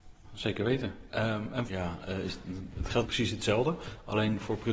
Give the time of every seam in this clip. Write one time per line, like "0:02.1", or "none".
0:01.7
0:03.0